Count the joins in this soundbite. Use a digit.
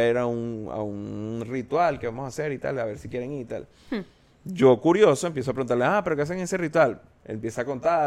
0